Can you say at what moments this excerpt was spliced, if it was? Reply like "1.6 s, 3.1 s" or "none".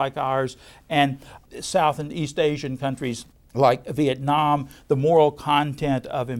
3.3 s